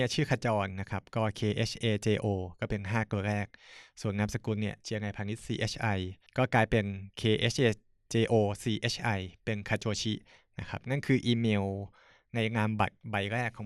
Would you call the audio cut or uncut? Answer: cut